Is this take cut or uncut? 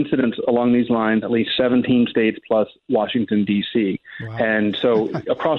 cut